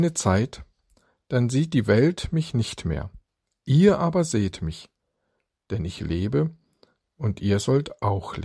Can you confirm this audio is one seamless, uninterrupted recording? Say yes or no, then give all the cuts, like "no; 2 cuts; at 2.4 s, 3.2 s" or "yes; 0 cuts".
yes; 0 cuts